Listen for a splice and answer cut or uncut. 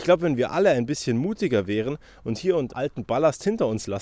cut